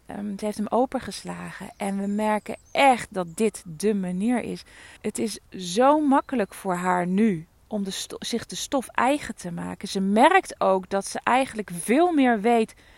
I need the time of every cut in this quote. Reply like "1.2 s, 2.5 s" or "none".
2.6 s, 5.0 s, 5.5 s

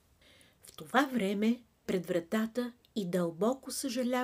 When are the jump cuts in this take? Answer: 1.9 s, 2.8 s

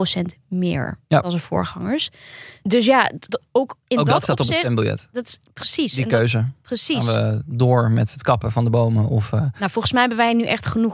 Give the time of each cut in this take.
3.3 s

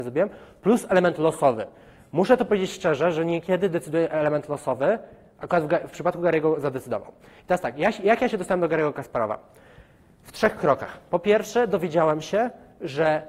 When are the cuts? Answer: none

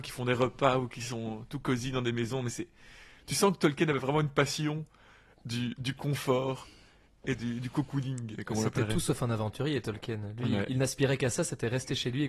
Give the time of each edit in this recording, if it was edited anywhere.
none

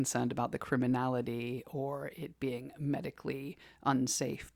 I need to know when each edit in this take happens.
none

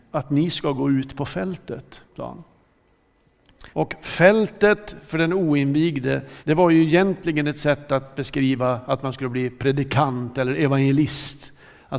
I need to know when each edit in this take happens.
2.1 s, 3.7 s, 6.4 s

